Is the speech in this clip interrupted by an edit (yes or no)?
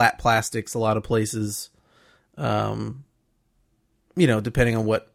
no